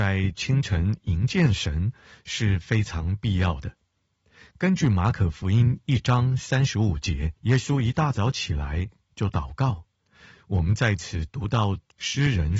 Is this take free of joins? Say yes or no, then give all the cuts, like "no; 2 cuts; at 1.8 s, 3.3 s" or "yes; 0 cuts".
no; 1 cut; at 7.4 s